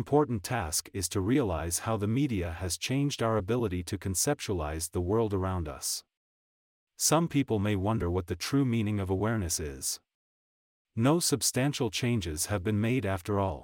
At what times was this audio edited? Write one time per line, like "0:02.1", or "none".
none